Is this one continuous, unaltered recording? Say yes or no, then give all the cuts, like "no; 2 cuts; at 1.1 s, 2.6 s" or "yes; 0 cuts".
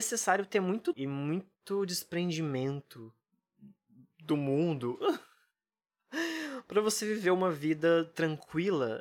no; 1 cut; at 0.9 s